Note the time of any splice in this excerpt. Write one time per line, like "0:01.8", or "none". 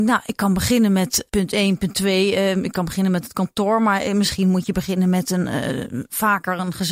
none